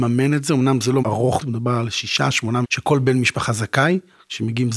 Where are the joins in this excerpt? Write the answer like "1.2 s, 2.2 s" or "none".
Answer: 1.0 s, 1.4 s, 2.6 s